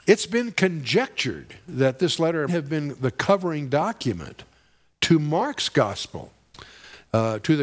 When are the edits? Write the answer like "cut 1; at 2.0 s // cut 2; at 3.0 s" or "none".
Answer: cut 1; at 2.5 s